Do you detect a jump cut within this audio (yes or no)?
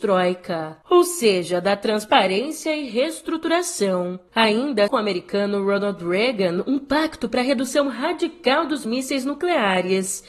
yes